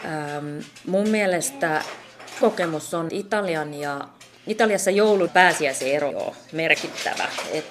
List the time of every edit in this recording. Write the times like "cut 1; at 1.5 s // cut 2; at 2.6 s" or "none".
cut 1; at 2.4 s // cut 2; at 3.1 s // cut 3; at 5.3 s // cut 4; at 6.1 s